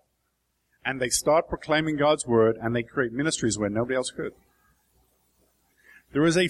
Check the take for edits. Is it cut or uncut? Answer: uncut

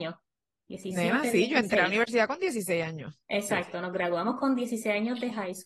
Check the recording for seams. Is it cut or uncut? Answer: uncut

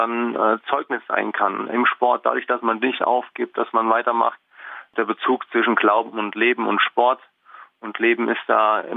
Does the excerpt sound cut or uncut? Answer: uncut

